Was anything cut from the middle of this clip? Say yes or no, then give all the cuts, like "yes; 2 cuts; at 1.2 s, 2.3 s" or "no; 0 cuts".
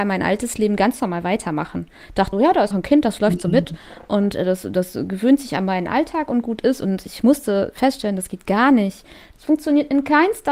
yes; 2 cuts; at 2.3 s, 2.7 s